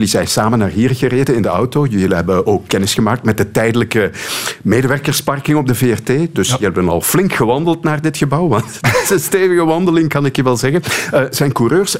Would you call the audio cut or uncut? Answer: cut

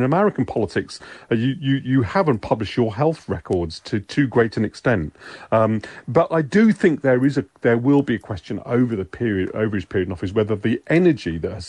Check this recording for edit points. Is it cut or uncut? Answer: uncut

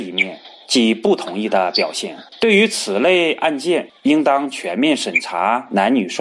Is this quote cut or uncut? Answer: cut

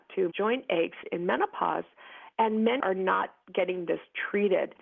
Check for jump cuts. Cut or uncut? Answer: cut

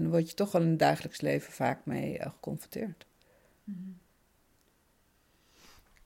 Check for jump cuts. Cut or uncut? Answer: uncut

